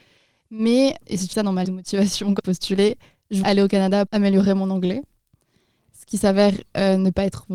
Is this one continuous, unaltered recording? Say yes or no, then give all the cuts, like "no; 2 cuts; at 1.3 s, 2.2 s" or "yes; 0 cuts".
no; 6 cuts; at 1.0 s, 1.3 s, 1.6 s, 2.4 s, 3.4 s, 4.1 s